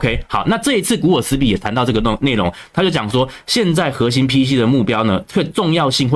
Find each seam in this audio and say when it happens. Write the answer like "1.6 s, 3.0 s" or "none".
none

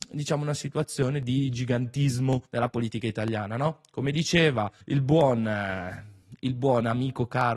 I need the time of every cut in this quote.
2.5 s, 4.8 s

